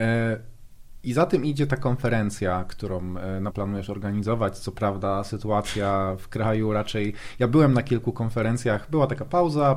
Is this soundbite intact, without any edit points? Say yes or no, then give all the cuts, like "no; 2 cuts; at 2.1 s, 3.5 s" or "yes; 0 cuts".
no; 1 cut; at 3.5 s